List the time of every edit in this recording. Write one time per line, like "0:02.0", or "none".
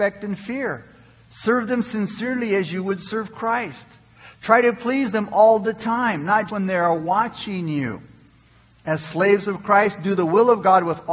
0:06.5